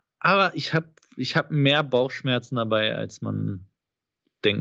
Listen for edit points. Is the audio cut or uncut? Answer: uncut